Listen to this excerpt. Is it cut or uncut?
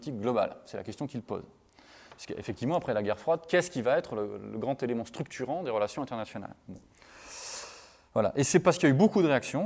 uncut